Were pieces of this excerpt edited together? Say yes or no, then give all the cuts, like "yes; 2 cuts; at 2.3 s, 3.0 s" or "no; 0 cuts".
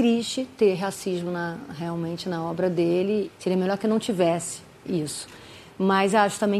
no; 0 cuts